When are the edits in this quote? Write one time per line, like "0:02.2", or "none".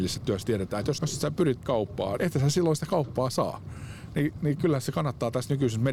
0:01.0
0:01.6
0:02.2